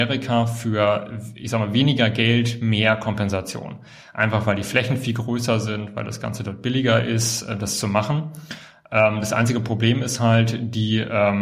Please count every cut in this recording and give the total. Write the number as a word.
zero